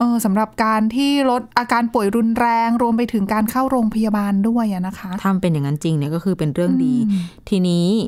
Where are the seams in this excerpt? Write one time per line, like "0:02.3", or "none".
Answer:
0:01.5